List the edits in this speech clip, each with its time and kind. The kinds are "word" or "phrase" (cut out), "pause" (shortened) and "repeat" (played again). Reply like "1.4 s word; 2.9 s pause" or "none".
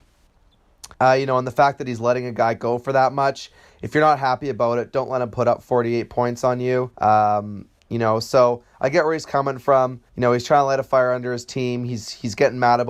0.9 s pause; 6.9 s pause; 10.1 s pause